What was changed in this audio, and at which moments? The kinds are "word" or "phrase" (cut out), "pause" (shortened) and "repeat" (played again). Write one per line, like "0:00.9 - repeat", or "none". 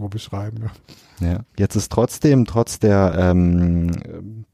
0:01.5 - pause
0:03.1 - phrase